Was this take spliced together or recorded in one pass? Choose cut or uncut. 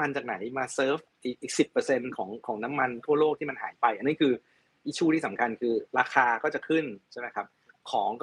cut